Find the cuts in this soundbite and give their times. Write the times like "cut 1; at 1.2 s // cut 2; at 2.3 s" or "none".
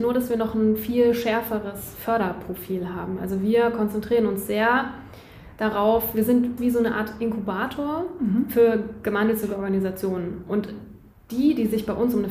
cut 1; at 6.6 s